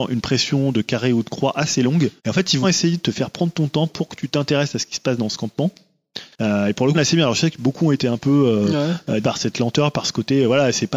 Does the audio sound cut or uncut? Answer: cut